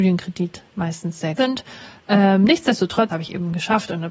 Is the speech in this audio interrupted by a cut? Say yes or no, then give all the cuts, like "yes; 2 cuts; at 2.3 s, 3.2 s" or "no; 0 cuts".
yes; 2 cuts; at 1.4 s, 3.1 s